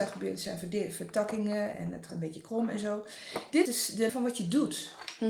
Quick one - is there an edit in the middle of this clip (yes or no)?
yes